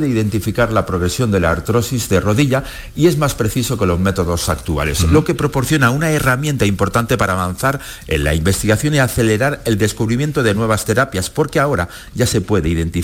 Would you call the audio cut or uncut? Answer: uncut